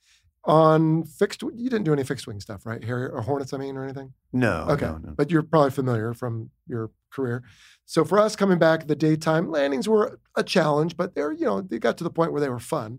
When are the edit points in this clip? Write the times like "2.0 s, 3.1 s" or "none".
none